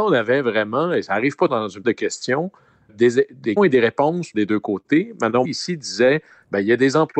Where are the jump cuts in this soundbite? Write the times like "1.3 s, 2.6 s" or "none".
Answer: 1.5 s, 1.8 s, 2.9 s, 3.6 s, 4.3 s, 5.4 s